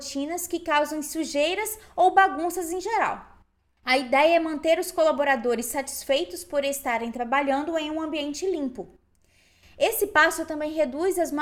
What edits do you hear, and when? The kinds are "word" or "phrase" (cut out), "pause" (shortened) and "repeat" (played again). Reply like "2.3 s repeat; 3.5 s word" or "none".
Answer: none